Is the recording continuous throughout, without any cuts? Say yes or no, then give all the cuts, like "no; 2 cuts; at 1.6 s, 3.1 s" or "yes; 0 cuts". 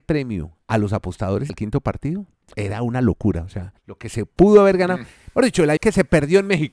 no; 3 cuts; at 1.5 s, 3.8 s, 5.8 s